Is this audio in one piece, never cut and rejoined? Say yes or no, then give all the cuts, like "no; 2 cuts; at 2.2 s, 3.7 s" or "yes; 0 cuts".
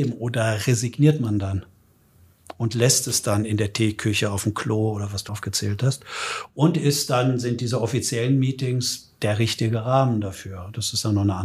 no; 1 cut; at 5.3 s